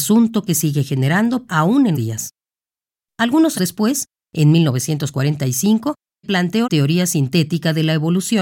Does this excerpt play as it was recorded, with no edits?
no; 5 cuts; at 1.5 s, 1.9 s, 3.5 s, 6.2 s, 6.6 s

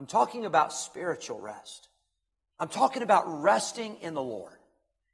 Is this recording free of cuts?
yes; 0 cuts

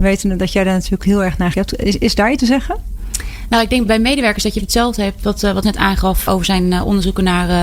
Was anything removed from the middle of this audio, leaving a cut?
yes; 7 cuts; at 1.0 s, 1.5 s, 2.4 s, 3.9 s, 4.6 s, 5.6 s, 6.3 s

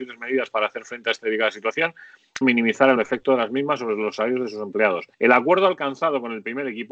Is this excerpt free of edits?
no; 3 cuts; at 2.4 s, 3.0 s, 5.1 s

